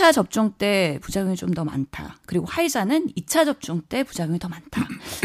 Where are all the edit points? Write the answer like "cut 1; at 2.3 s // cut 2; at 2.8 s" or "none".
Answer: none